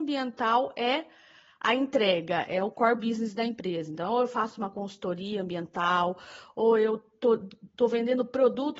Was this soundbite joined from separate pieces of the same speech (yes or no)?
no